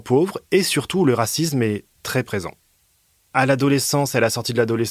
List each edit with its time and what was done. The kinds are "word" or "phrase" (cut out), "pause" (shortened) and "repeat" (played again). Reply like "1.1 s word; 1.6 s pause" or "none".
none